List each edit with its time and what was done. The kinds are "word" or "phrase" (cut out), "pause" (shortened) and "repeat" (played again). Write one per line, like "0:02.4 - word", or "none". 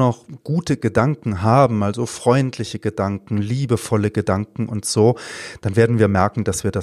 none

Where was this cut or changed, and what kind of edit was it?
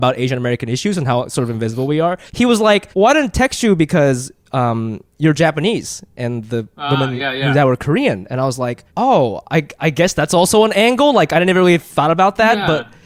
0:02.3 - pause
0:02.9 - pause
0:08.9 - pause

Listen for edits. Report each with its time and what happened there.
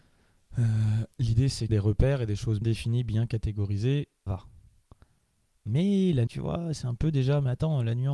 0:01.1 - pause
0:01.7 - phrase
0:02.6 - word
0:04.3 - word
0:06.3 - word

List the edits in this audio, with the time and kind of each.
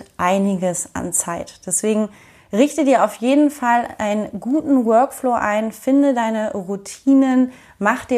none

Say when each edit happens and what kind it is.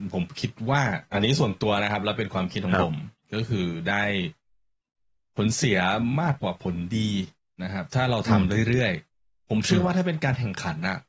none

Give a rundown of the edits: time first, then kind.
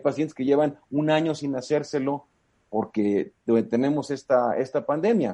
none

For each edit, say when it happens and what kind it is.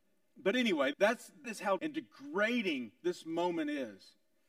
0:00.9 - word
0:01.4 - word
0:01.8 - word

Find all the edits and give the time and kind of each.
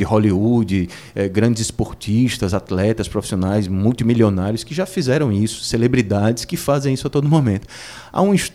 none

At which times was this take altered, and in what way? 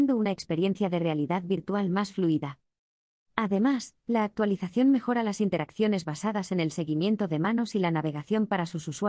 none

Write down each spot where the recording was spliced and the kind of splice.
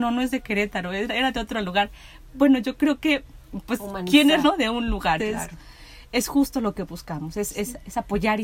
0:04.4 - word
0:05.2 - word

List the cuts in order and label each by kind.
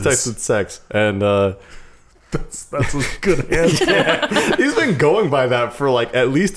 none

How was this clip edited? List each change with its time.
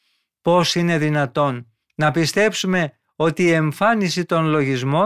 0:01.8 - pause

